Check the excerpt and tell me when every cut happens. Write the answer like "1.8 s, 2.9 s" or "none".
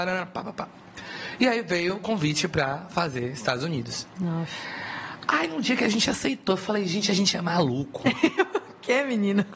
none